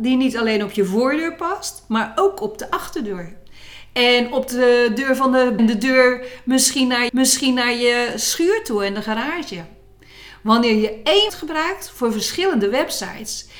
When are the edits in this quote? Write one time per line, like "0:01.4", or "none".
0:05.6
0:07.1
0:11.3